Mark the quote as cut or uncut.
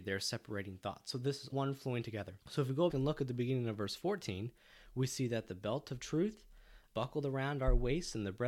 cut